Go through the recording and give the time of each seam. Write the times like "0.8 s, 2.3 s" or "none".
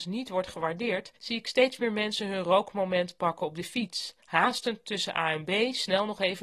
1.2 s, 4.2 s

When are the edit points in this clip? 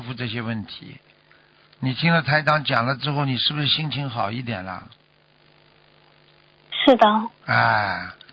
none

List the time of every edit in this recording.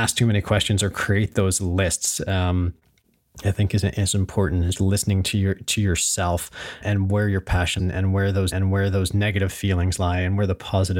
3.4 s, 4.7 s, 6.8 s, 7.8 s, 8.5 s

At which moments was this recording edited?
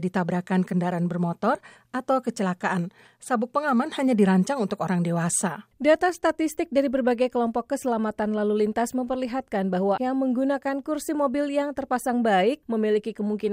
10.0 s

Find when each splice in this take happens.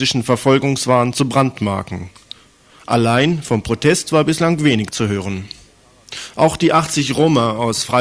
none

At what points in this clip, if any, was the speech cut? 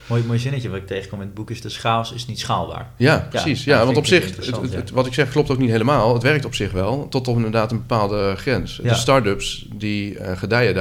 none

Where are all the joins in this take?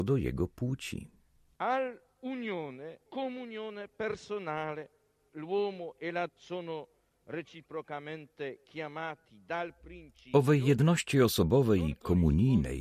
3.1 s, 5.3 s, 6.3 s

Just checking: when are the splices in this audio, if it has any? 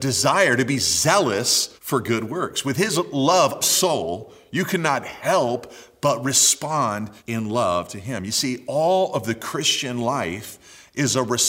1.8 s, 3.6 s, 7.2 s

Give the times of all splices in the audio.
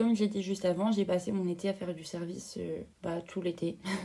2.9 s

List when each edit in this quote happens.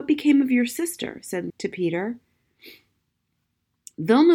1.5 s

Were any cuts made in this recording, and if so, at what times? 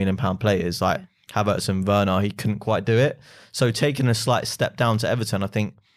none

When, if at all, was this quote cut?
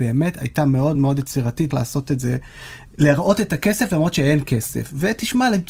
1.0 s, 1.7 s

